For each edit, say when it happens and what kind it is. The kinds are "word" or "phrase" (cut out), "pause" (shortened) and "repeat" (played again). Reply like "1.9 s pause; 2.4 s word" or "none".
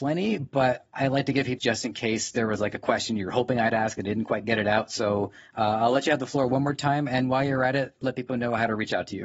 1.6 s phrase